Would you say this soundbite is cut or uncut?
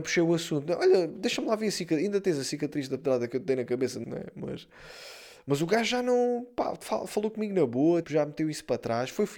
cut